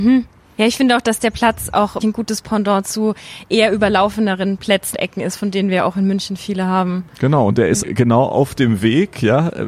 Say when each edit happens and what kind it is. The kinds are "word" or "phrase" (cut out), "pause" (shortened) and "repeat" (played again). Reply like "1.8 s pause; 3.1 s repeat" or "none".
2.0 s word; 4.9 s word; 7.8 s word